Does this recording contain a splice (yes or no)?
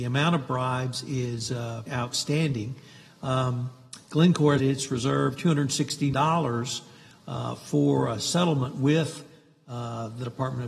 yes